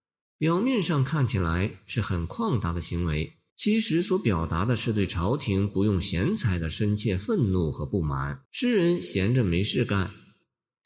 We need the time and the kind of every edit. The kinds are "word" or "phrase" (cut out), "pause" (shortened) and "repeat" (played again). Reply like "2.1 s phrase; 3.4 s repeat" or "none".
3.5 s pause; 8.4 s pause

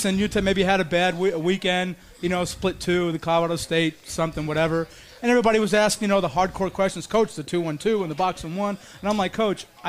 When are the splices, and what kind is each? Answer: none

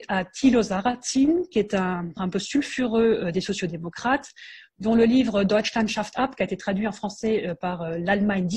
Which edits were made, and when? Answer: 2.2 s word; 6.1 s word

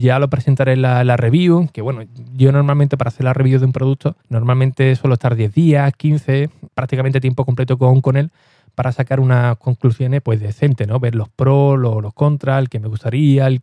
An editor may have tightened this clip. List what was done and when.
4.2 s pause; 6.7 s word; 10.2 s word

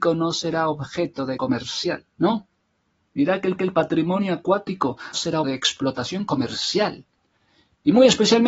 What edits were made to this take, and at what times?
1.4 s word; 2.1 s pause; 3.6 s repeat; 5.1 s word; 5.4 s word

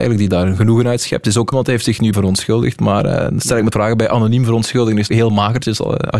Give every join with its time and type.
1.5 s word; 2.1 s word; 3.7 s word; 5.1 s word

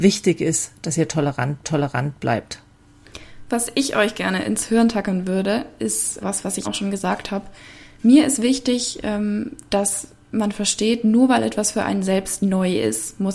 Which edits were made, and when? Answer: 1.6 s repeat; 6.2 s word; 6.6 s phrase

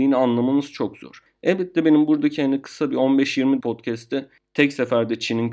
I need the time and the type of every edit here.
3.6 s word

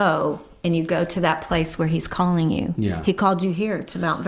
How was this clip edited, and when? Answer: none

